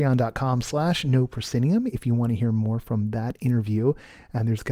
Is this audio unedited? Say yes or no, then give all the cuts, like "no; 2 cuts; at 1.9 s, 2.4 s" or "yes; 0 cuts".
yes; 0 cuts